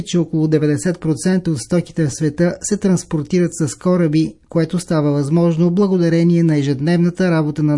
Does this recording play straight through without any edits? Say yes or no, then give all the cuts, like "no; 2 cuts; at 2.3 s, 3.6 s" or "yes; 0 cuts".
yes; 0 cuts